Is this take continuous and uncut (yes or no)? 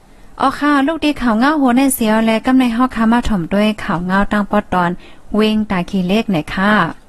yes